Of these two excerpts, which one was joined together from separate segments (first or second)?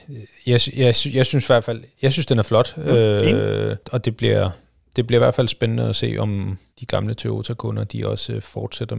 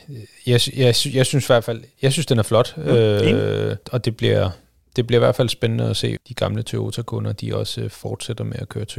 second